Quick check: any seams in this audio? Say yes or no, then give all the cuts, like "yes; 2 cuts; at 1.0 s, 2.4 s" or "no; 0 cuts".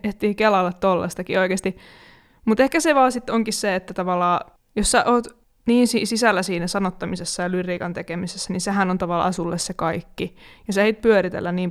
no; 0 cuts